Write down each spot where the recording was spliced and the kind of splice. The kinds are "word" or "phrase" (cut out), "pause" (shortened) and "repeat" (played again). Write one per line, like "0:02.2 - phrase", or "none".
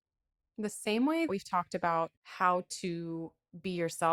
0:01.3 - word
0:02.2 - pause